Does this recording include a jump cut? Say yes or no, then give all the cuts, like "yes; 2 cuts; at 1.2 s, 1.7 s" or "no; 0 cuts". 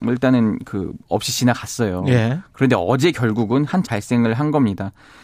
yes; 2 cuts; at 1.0 s, 3.8 s